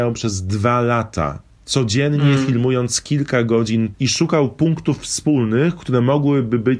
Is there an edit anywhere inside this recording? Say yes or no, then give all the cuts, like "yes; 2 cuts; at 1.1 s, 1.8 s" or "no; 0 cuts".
yes; 1 cut; at 3.9 s